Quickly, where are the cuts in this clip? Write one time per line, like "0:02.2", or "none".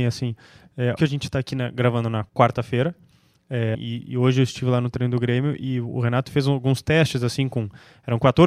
0:01.0
0:02.3
0:03.7